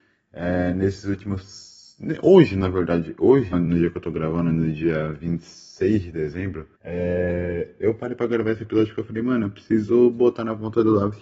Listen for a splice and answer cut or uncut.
cut